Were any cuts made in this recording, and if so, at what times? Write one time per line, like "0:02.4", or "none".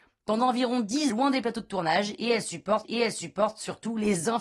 0:01.1
0:02.8